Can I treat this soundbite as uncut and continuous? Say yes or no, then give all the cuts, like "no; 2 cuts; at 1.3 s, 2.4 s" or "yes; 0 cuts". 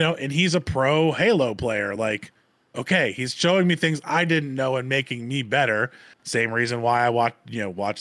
yes; 0 cuts